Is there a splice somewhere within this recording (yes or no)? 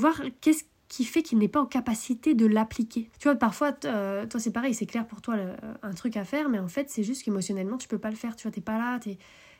yes